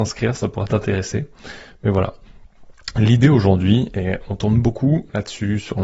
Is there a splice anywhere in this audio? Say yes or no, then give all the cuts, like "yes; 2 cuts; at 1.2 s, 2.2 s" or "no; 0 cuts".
no; 0 cuts